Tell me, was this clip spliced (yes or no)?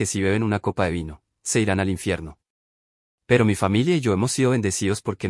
no